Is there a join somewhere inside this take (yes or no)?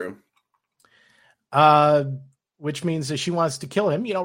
no